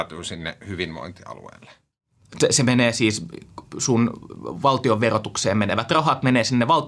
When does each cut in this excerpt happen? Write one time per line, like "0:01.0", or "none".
none